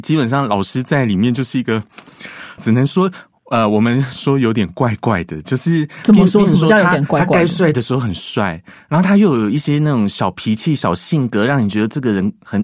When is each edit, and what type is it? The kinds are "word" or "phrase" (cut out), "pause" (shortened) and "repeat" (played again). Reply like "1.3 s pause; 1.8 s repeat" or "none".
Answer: 2.6 s word

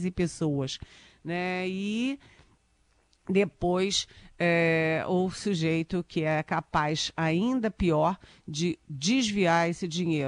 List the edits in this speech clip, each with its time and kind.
none

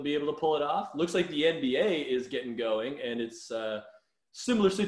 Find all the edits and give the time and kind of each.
none

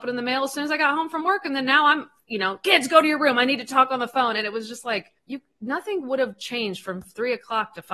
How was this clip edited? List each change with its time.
5.2 s pause

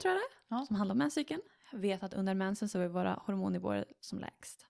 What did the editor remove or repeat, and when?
none

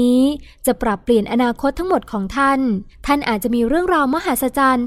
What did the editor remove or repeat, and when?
2.9 s pause

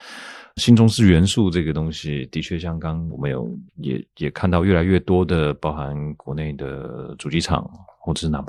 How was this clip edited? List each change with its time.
3.1 s phrase; 3.7 s pause

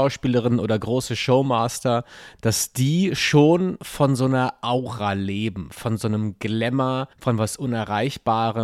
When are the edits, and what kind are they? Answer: 7.1 s pause

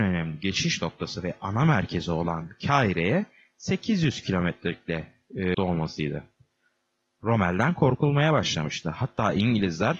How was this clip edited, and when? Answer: 5.5 s word

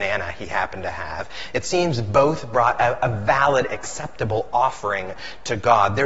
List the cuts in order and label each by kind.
none

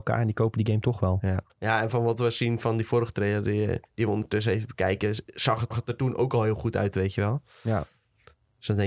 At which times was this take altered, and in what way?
1.5 s pause; 3.9 s pause; 5.7 s repeat

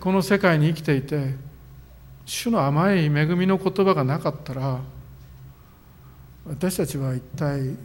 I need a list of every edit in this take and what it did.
2.2 s pause

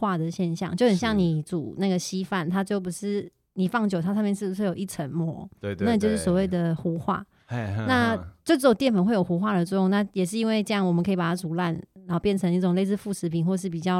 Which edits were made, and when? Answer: none

